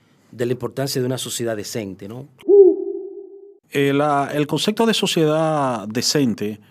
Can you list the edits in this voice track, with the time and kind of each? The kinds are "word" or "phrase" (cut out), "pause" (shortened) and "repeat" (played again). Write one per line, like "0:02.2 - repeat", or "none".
0:03.6 - pause